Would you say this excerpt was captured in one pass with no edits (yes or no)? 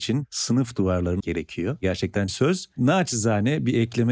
no